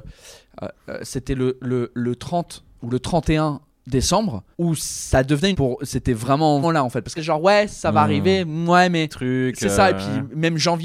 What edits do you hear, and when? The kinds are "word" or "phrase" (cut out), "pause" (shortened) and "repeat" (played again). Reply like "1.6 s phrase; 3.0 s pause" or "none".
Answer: 4.5 s pause; 5.5 s phrase; 6.6 s word; 7.2 s phrase; 9.1 s phrase